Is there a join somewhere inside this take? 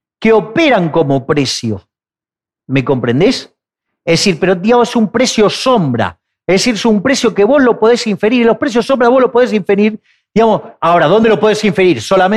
no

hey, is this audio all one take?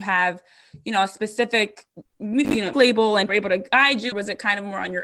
no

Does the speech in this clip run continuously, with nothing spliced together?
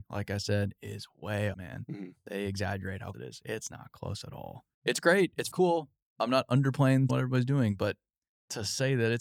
no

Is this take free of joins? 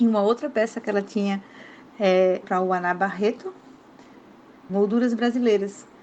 no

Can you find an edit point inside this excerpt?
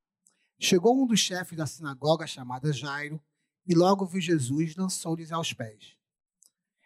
no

